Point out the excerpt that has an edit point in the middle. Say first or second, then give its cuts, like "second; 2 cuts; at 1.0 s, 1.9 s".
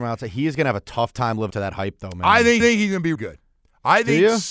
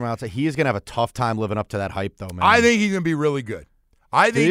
first; 3 cuts; at 1.5 s, 2.6 s, 3.1 s